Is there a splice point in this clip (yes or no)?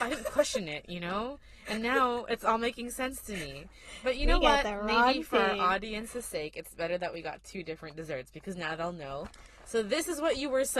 no